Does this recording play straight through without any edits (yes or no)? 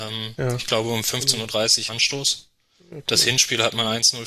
no